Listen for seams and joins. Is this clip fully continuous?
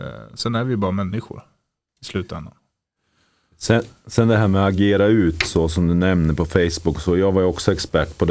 yes; 0 cuts

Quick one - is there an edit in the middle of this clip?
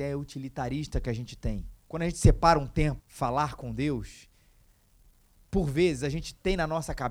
yes; 2 cuts; at 1.8 s, 3.0 s

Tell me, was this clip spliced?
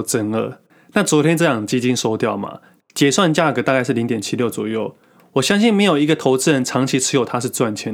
no; 0 cuts

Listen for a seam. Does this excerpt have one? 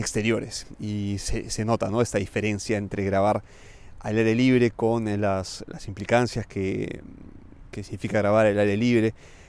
no; 0 cuts

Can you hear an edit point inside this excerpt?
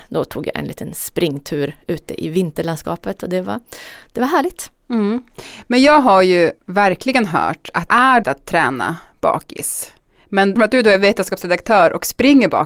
yes; 4 cuts; at 6.6 s, 7.9 s, 8.2 s, 10.6 s

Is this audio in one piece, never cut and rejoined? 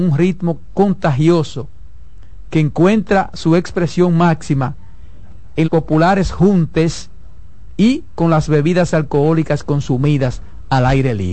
no; 1 cut; at 5.6 s

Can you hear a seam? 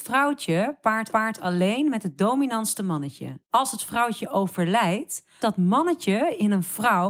yes; 3 cuts; at 1.1 s, 3.5 s, 5.4 s

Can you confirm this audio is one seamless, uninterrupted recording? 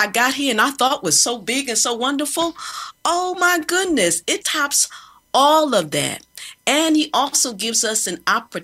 no; 1 cut; at 4.4 s

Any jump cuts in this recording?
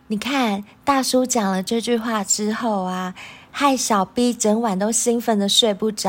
no; 0 cuts

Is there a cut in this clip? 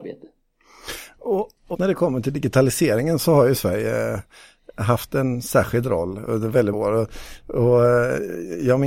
yes; 3 cuts; at 1.7 s, 6.3 s, 6.7 s

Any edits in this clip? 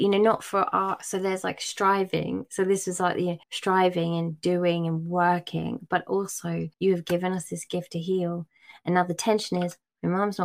yes; 2 cuts; at 3.4 s, 6.7 s

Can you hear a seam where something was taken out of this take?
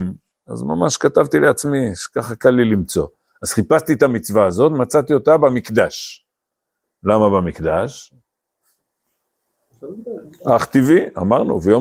no; 0 cuts

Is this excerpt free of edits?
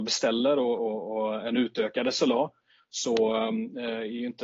yes; 0 cuts

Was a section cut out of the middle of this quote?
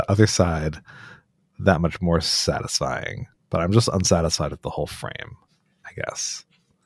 no; 0 cuts

